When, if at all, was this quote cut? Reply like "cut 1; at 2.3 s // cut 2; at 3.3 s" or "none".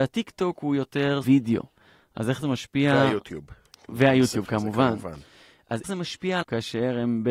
cut 1; at 1.2 s // cut 2; at 5.8 s // cut 3; at 6.4 s